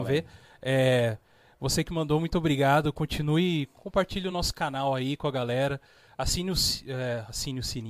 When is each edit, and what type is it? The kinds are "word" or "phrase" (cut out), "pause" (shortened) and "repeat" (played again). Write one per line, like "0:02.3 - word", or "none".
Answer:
none